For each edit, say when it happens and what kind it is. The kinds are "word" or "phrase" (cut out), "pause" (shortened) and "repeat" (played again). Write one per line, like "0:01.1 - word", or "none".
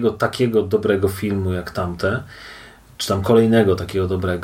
none